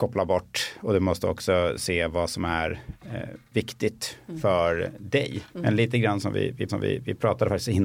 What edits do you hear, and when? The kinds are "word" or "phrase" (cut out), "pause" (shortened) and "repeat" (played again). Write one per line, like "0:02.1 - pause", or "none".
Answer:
0:05.5 - pause
0:06.7 - repeat